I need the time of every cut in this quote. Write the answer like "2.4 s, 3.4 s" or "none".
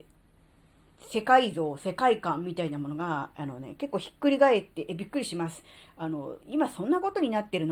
6.4 s